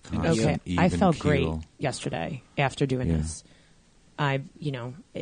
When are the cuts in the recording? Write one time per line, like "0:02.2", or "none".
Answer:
none